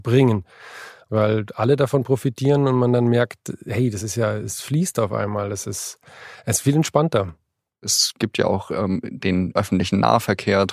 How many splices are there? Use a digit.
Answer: 0